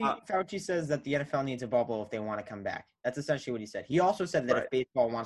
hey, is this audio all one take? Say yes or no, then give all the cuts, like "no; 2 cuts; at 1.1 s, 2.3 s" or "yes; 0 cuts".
yes; 0 cuts